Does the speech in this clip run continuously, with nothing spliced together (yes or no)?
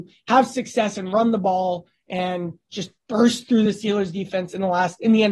yes